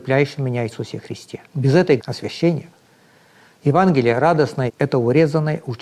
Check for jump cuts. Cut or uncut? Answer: cut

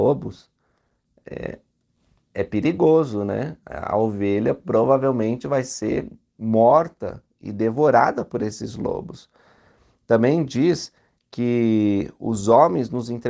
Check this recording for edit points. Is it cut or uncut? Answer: uncut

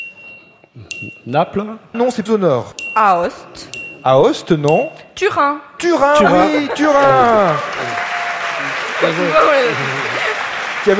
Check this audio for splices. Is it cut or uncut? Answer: cut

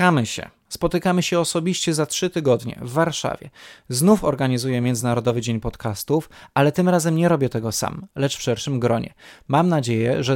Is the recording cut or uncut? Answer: uncut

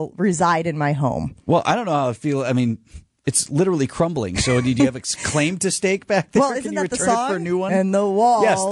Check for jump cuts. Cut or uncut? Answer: uncut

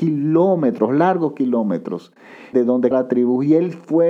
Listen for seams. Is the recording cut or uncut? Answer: cut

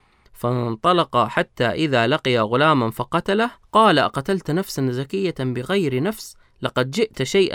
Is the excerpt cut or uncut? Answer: cut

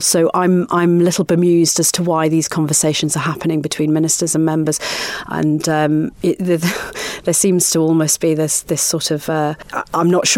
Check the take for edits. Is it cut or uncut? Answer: uncut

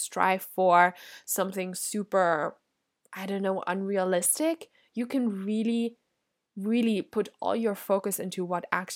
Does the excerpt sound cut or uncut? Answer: uncut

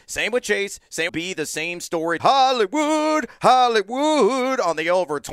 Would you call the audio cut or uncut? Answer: cut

